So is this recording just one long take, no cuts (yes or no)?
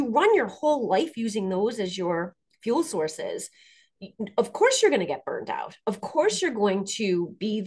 yes